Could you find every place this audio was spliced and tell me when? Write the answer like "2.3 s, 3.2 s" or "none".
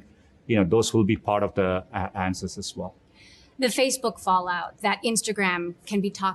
none